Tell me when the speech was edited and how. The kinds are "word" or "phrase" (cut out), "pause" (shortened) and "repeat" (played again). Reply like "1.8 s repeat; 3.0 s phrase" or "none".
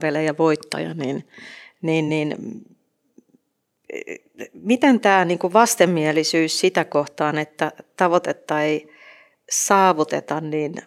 none